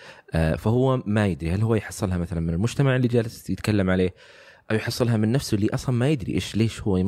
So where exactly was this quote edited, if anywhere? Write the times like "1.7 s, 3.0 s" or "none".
none